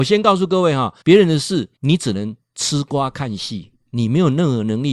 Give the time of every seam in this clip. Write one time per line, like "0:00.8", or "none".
0:01.0
0:01.8